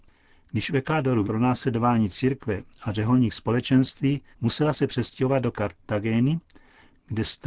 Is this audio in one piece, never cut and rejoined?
no; 3 cuts; at 1.2 s, 4.3 s, 5.5 s

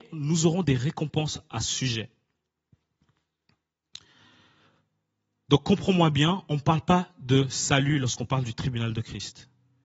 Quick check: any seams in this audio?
no; 0 cuts

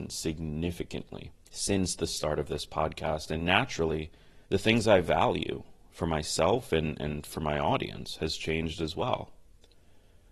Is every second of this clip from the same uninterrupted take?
no; 2 cuts; at 1.4 s, 4.4 s

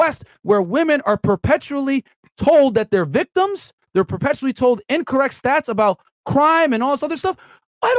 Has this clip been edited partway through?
no; 0 cuts

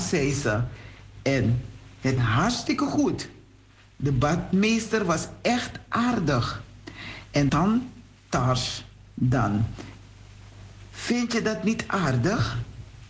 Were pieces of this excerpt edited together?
yes; 2 cuts; at 2.2 s, 7.5 s

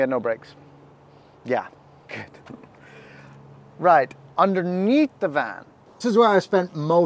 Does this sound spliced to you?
yes; 3 cuts; at 2.1 s, 4.3 s, 6.0 s

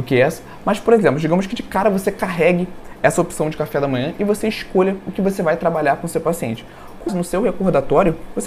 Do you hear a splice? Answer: yes; 1 cut; at 7.1 s

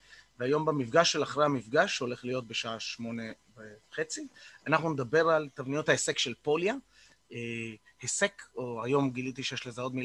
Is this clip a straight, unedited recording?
yes; 0 cuts

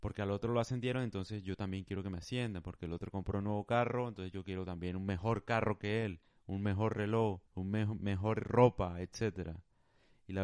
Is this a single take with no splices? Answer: no; 1 cut; at 7.5 s

